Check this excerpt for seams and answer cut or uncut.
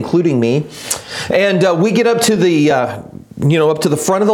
uncut